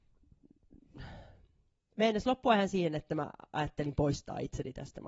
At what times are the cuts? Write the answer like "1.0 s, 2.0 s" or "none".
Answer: none